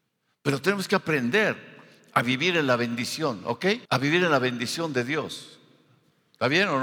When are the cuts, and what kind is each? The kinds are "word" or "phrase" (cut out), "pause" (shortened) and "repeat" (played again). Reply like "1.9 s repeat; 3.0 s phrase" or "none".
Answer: 3.9 s pause